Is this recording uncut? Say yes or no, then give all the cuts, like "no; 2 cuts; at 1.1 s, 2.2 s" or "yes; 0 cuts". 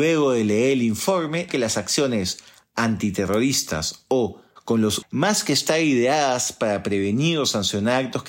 no; 3 cuts; at 1.5 s, 4.6 s, 5.0 s